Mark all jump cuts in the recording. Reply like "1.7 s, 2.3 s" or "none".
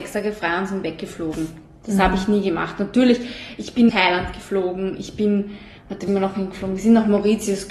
3.9 s, 5.8 s, 6.1 s